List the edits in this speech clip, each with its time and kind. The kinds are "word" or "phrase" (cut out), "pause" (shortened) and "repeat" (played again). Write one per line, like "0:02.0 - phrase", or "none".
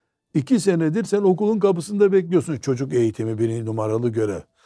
none

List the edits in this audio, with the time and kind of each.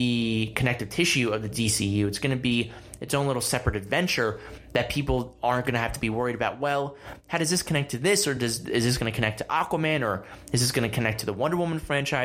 none

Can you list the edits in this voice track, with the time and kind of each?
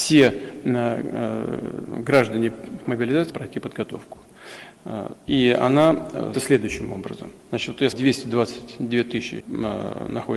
0:02.8 - phrase
0:03.3 - word
0:05.2 - pause
0:06.3 - word
0:07.4 - pause
0:07.9 - word
0:09.4 - word

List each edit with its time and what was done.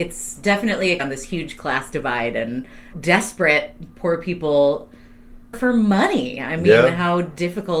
0:01.0 - word
0:02.9 - word
0:05.5 - word

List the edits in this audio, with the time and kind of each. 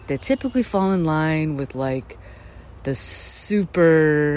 none

